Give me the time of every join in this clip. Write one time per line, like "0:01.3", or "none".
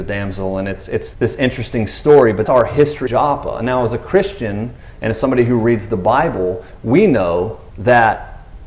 0:01.1
0:02.5
0:03.1
0:07.7